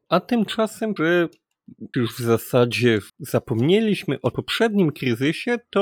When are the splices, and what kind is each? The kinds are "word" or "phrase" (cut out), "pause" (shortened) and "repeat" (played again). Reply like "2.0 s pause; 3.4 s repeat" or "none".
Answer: 1.0 s phrase; 1.9 s word; 3.1 s pause; 4.3 s word